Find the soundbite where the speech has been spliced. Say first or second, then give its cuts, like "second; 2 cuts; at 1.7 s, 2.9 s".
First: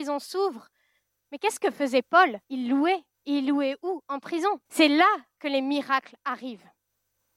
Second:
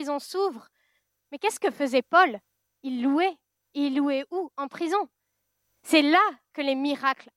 first; 3 cuts; at 2.4 s, 3.1 s, 4.6 s